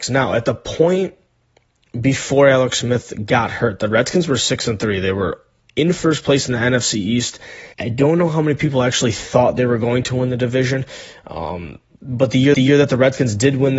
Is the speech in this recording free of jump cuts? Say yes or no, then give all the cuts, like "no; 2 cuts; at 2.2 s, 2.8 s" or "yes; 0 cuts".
no; 2 cuts; at 7.7 s, 12.5 s